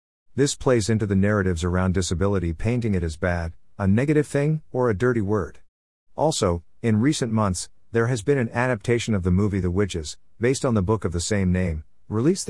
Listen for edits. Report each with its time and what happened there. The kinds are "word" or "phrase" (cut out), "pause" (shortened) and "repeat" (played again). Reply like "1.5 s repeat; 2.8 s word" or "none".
none